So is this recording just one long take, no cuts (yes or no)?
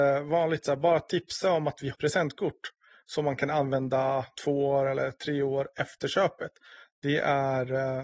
no